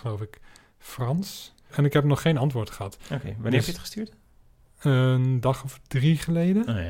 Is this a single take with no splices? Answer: yes; 0 cuts

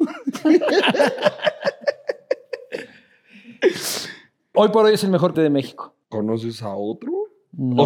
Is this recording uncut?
no; 3 cuts; at 4.5 s, 5.3 s, 6.0 s

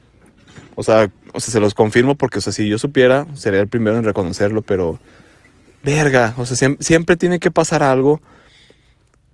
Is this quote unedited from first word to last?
yes; 0 cuts

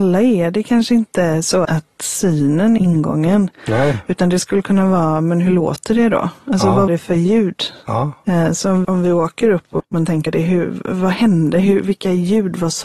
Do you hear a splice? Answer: yes; 6 cuts; at 1.6 s, 2.8 s, 6.9 s, 8.8 s, 9.8 s, 10.3 s

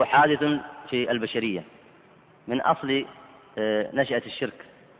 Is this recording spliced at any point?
no; 0 cuts

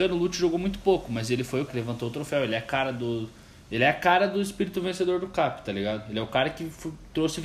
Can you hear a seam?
yes; 1 cut; at 1.7 s

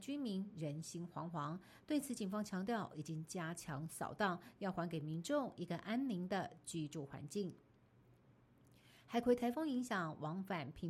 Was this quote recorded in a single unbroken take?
yes; 0 cuts

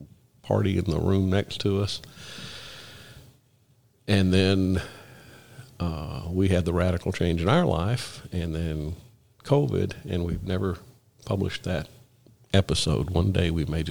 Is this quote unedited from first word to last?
yes; 0 cuts

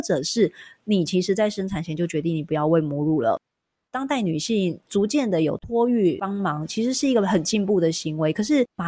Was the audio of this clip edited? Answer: no; 0 cuts

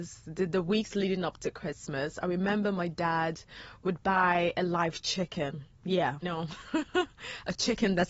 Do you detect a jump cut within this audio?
yes; 1 cut; at 6.2 s

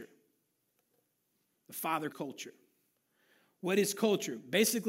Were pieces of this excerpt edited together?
yes; 1 cut; at 2.1 s

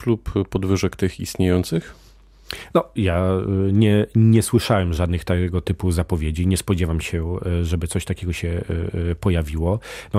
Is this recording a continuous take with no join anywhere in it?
yes; 0 cuts

